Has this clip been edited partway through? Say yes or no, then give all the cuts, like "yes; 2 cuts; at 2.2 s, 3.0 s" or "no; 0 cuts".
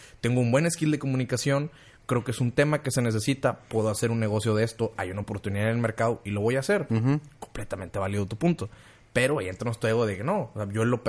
no; 0 cuts